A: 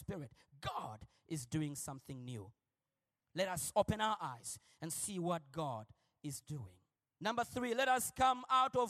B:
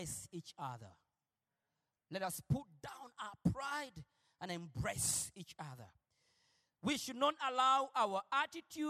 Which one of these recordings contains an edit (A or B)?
A